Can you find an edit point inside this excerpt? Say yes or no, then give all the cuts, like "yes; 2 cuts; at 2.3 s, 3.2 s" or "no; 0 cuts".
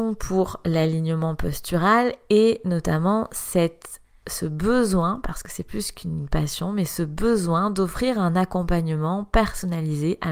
no; 0 cuts